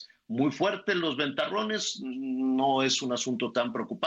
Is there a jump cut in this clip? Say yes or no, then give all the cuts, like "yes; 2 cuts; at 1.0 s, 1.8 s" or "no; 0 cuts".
no; 0 cuts